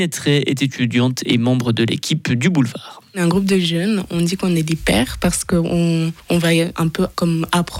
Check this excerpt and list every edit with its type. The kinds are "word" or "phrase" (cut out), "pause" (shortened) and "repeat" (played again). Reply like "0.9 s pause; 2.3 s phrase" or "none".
none